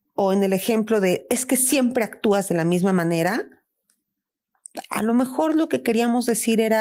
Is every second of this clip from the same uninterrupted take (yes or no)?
yes